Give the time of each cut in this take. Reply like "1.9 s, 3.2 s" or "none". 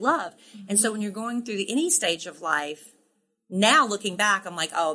none